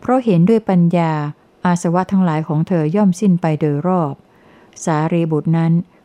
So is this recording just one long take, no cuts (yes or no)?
yes